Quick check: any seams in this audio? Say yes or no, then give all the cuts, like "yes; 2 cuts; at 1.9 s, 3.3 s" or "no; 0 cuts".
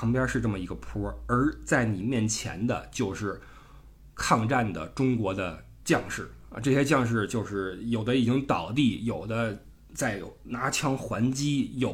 no; 0 cuts